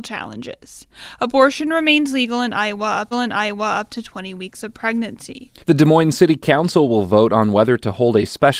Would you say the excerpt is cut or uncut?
cut